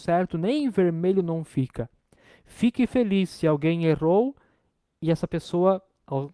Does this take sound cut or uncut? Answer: uncut